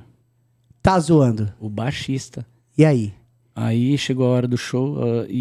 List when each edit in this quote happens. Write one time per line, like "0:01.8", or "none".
none